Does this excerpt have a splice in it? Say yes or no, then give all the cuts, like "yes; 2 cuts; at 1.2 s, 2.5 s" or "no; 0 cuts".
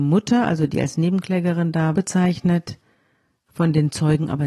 yes; 1 cut; at 1.9 s